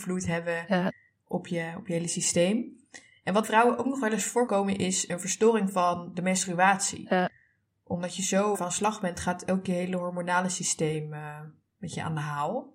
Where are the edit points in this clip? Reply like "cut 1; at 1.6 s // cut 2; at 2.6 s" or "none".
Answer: cut 1; at 3.4 s // cut 2; at 4.5 s // cut 3; at 8.5 s